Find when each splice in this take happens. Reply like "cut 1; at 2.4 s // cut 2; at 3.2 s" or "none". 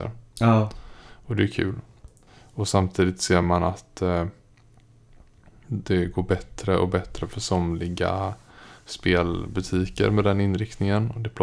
none